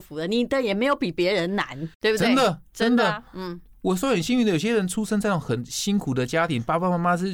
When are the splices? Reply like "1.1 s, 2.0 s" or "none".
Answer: 1.9 s, 3.3 s

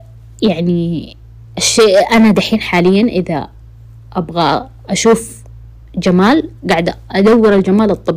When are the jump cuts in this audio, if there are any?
none

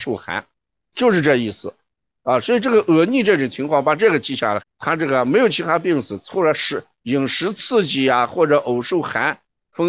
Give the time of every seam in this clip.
0.9 s, 4.6 s

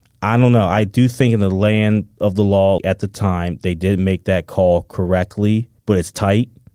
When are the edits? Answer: 2.8 s, 5.8 s

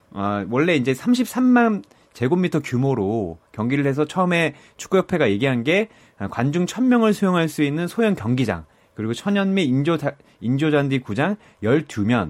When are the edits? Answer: none

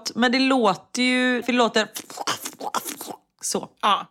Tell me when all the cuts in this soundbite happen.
1.4 s

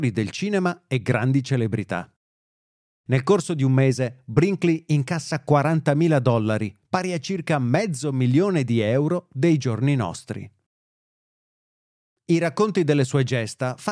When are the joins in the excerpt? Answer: none

